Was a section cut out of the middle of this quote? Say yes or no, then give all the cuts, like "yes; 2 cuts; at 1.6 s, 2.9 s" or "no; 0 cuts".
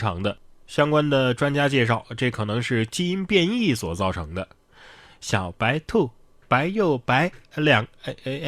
no; 0 cuts